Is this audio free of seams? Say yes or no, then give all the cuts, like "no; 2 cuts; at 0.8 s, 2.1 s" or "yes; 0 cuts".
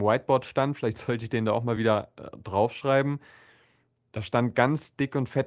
yes; 0 cuts